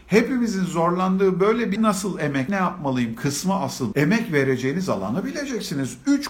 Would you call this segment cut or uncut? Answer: cut